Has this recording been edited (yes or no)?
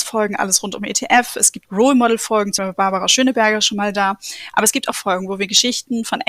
yes